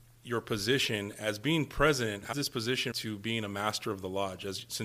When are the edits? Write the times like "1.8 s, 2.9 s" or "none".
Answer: 2.3 s, 2.9 s